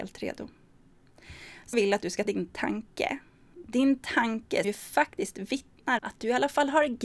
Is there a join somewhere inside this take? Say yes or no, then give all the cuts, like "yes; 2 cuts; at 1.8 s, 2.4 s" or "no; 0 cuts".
yes; 4 cuts; at 1.7 s, 2.2 s, 4.6 s, 6.0 s